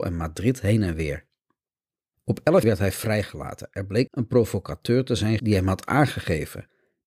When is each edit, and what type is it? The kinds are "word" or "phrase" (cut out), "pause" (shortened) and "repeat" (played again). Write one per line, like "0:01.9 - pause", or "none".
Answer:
0:02.6 - word
0:04.1 - word
0:05.4 - word